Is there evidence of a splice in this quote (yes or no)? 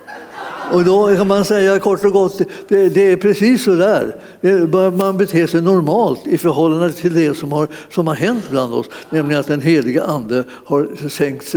no